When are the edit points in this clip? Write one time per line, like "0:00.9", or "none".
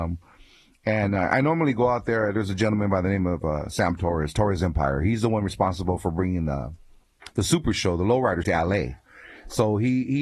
0:07.3
0:08.4